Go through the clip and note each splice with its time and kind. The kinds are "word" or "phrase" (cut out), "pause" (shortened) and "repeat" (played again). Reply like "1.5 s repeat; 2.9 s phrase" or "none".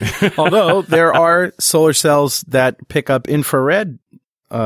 none